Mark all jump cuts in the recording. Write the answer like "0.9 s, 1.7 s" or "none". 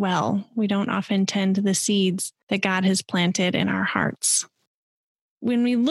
none